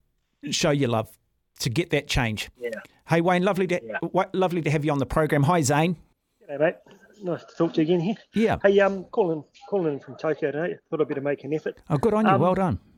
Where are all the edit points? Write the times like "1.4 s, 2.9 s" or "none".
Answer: 6.1 s